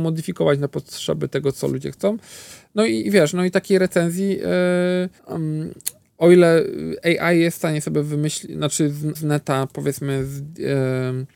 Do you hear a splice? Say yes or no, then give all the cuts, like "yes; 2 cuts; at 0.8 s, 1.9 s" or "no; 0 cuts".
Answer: yes; 2 cuts; at 5.2 s, 9.1 s